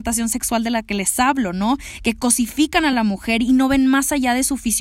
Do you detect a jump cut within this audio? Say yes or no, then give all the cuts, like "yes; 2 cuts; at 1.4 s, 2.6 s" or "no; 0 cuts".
no; 0 cuts